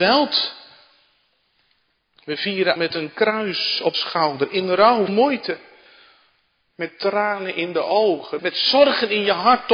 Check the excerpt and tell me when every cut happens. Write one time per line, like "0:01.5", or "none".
0:02.8
0:03.9
0:05.1
0:08.4